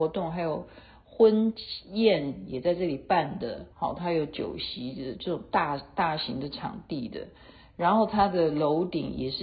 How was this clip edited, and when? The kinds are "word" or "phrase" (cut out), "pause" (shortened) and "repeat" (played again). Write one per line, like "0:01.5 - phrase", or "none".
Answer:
0:03.7 - pause